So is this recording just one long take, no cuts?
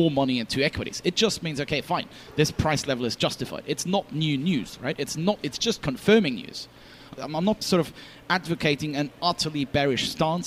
no; 2 cuts; at 7.1 s, 7.6 s

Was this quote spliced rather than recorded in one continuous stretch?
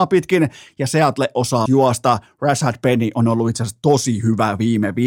yes; 1 cut; at 1.7 s

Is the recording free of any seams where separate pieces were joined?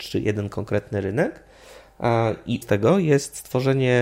no; 1 cut; at 2.6 s

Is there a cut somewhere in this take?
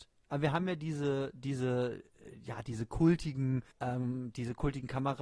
yes; 1 cut; at 3.7 s

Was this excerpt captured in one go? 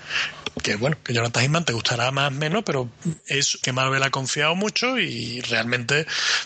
no; 1 cut; at 3.6 s

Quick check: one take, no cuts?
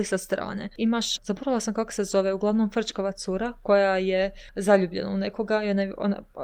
no; 2 cuts; at 1.2 s, 4.5 s

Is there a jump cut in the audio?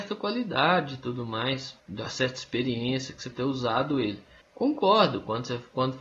yes; 3 cuts; at 1.8 s, 3.3 s, 4.4 s

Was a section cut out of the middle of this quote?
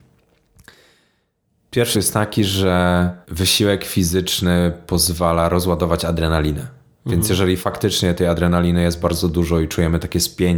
yes; 2 cuts; at 1.9 s, 3.2 s

